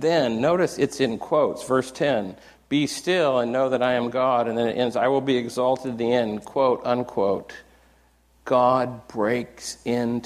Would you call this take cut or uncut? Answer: uncut